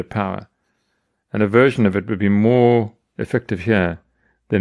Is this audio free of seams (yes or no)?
yes